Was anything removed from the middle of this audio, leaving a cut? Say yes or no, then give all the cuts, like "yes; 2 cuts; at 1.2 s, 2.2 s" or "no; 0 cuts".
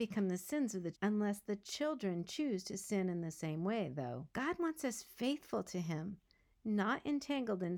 yes; 2 cuts; at 0.9 s, 4.3 s